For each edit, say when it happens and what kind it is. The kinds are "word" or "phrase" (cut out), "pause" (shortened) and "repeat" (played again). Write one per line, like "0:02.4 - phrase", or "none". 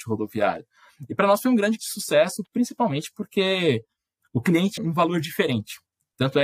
0:01.8 - word
0:04.8 - word